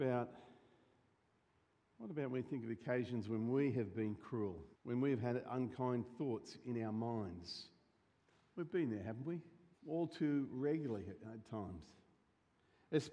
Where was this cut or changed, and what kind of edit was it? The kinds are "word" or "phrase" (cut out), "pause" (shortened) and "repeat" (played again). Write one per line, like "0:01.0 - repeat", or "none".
0:04.7 - pause
0:08.1 - pause
0:09.7 - pause